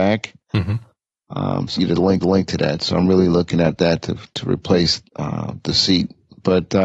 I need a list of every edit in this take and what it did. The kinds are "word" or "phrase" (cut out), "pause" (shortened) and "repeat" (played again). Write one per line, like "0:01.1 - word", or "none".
0:01.8 - phrase
0:02.2 - repeat
0:05.1 - pause